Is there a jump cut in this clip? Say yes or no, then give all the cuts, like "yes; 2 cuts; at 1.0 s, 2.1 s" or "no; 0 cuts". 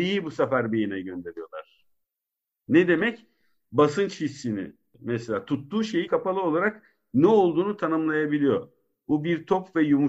yes; 1 cut; at 6.1 s